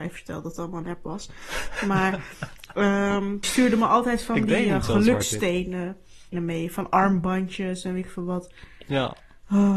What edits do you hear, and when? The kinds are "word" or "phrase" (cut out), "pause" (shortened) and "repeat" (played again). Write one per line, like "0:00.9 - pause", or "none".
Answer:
0:03.4 - word
0:06.3 - word